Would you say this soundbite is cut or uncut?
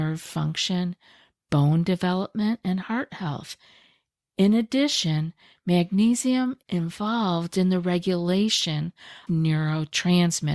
cut